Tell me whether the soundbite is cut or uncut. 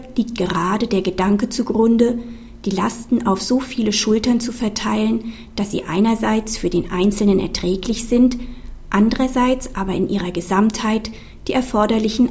uncut